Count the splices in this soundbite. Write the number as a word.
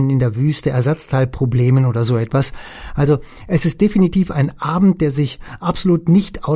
zero